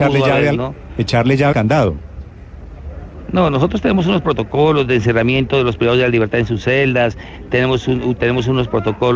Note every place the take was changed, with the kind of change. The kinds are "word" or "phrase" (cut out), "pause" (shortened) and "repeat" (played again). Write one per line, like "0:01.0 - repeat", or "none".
0:01.5 - word